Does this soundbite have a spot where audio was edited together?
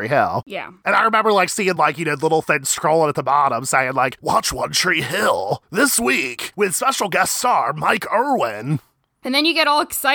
no; 0 cuts

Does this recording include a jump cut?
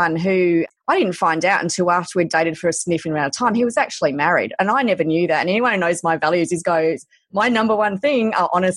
no; 0 cuts

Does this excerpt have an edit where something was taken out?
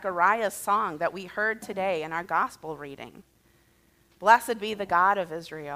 no; 0 cuts

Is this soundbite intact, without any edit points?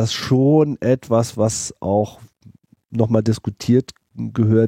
yes; 0 cuts

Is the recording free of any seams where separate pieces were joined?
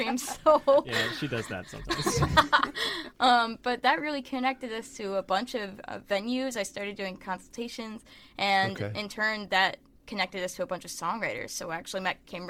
yes; 0 cuts

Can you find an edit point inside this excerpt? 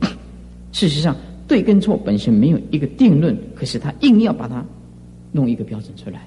no; 0 cuts

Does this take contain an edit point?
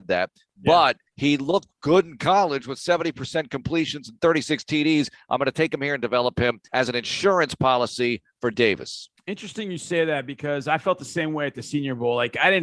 yes; 2 cuts; at 1.1 s, 6.7 s

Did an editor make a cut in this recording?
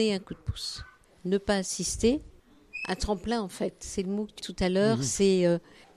yes; 1 cut; at 4.4 s

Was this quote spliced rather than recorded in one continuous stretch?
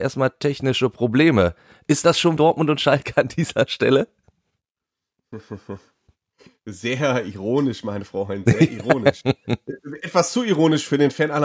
yes; 1 cut; at 2.4 s

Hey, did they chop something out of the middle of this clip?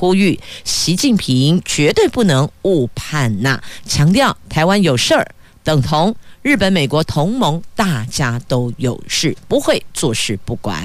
no; 0 cuts

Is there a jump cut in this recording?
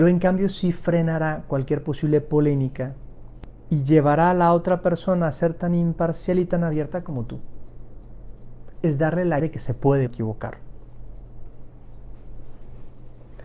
yes; 2 cuts; at 9.4 s, 10.1 s

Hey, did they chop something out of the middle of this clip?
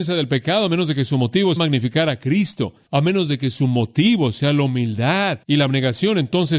yes; 2 cuts; at 1.6 s, 5.4 s

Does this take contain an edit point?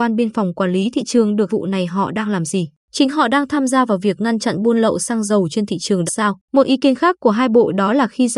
yes; 4 cuts; at 1.5 s, 2.8 s, 6.1 s, 6.4 s

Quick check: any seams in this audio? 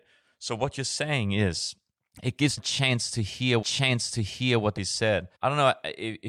yes; 5 cuts; at 2.0 s, 2.6 s, 3.6 s, 4.8 s, 5.3 s

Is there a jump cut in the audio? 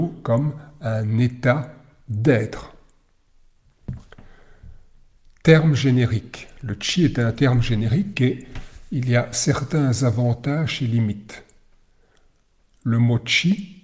no; 0 cuts

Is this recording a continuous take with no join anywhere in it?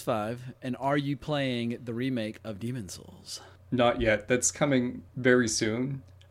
no; 1 cut; at 5.1 s

